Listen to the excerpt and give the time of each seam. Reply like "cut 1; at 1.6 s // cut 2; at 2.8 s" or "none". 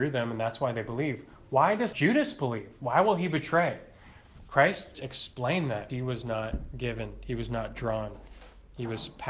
cut 1; at 1.9 s // cut 2; at 4.9 s // cut 3; at 5.9 s

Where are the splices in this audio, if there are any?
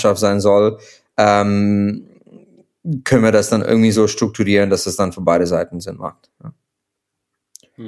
none

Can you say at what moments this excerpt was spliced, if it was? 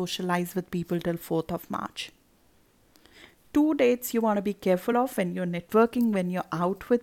none

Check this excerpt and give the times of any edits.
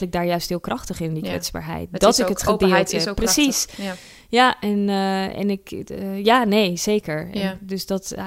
none

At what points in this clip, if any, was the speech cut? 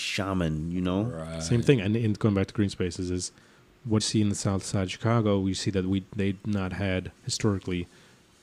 cut 1; at 4.0 s

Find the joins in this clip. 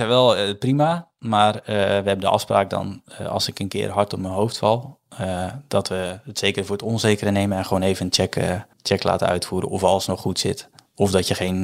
cut 1; at 8.7 s

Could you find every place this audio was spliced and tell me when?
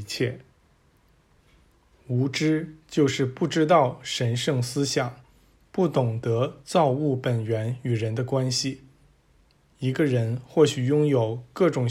none

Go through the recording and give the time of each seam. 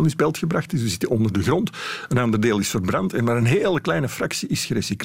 none

